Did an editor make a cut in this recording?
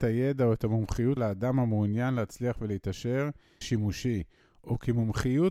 yes; 2 cuts; at 1.2 s, 3.6 s

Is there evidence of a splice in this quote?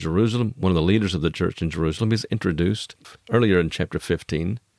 no; 0 cuts

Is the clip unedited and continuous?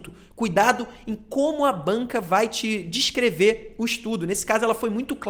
yes; 0 cuts

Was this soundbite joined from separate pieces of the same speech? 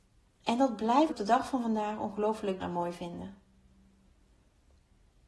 yes; 2 cuts; at 1.1 s, 2.6 s

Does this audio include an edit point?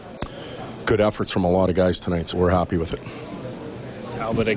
yes; 1 cut; at 2.3 s

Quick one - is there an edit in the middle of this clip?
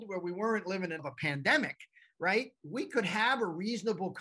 yes; 1 cut; at 1.0 s

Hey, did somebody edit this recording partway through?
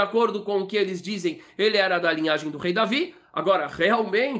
no; 0 cuts

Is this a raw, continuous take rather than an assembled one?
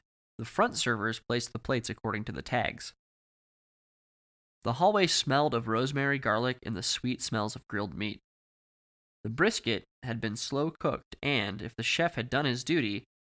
yes; 0 cuts

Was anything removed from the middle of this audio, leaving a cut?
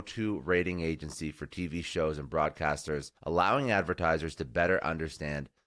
yes; 1 cut; at 3.2 s

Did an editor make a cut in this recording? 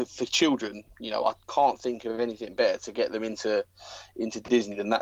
yes; 1 cut; at 0.9 s

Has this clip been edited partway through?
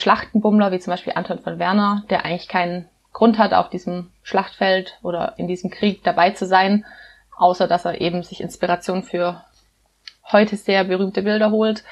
no; 0 cuts

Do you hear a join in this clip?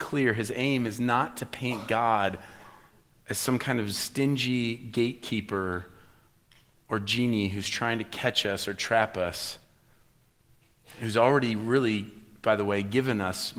no; 0 cuts

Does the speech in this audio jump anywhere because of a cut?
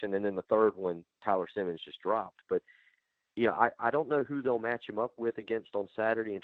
no; 0 cuts

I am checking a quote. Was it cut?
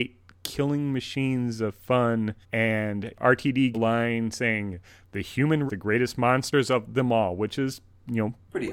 yes; 3 cuts; at 2.4 s, 3.7 s, 5.7 s

